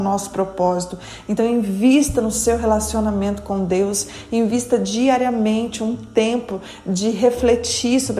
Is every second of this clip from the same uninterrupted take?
yes; 0 cuts

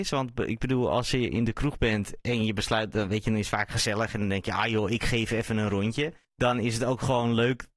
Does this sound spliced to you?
yes; 1 cut; at 6.2 s

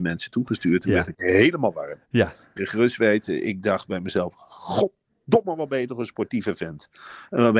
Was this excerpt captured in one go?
no; 2 cuts; at 1.1 s, 2.6 s

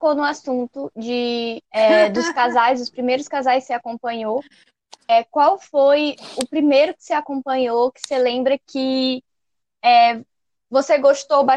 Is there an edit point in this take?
no; 0 cuts

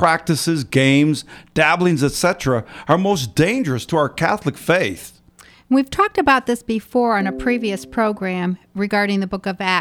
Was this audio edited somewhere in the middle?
no; 0 cuts

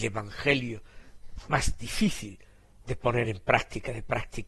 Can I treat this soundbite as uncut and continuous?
yes; 0 cuts

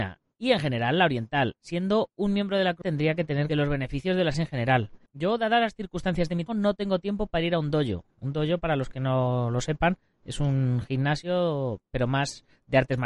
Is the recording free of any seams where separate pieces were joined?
no; 6 cuts; at 2.8 s, 3.5 s, 4.3 s, 5.1 s, 6.5 s, 8.1 s

